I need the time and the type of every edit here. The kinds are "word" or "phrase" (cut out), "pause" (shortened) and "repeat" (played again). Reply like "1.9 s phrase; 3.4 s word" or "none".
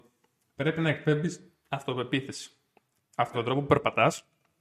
3.3 s word